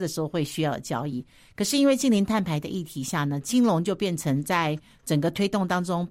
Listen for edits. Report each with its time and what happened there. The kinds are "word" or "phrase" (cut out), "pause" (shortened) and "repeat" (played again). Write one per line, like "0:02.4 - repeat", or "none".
none